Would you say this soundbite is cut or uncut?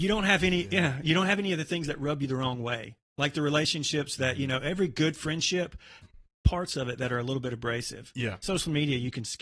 cut